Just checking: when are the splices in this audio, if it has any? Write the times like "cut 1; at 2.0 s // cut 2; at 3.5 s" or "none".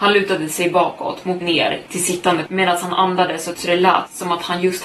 cut 1; at 1.4 s // cut 2; at 1.9 s // cut 3; at 2.5 s // cut 4; at 3.5 s